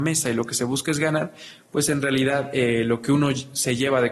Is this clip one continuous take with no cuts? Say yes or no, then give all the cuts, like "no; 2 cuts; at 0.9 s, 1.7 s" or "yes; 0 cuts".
yes; 0 cuts